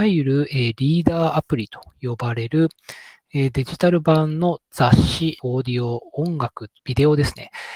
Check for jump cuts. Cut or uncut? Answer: cut